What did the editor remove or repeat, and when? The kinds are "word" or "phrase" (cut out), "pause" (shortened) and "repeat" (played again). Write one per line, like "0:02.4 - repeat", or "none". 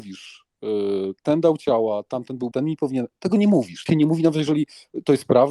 0:02.5 - word
0:03.9 - word